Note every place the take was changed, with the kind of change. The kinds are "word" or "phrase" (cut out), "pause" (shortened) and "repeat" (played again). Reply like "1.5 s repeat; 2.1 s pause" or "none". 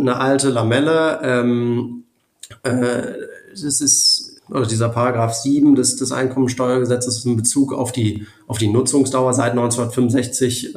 4.4 s pause